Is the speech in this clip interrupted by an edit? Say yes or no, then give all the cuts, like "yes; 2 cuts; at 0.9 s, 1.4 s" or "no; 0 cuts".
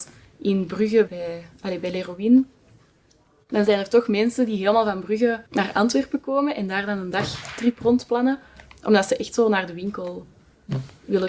yes; 2 cuts; at 1.1 s, 5.5 s